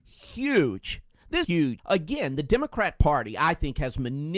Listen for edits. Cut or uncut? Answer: cut